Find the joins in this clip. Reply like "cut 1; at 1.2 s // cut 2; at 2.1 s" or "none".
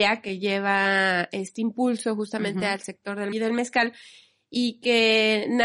cut 1; at 3.3 s